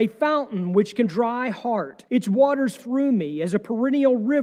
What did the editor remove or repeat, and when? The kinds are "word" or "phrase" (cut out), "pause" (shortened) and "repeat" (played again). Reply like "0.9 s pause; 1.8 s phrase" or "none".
1.1 s phrase; 2.1 s pause; 2.8 s word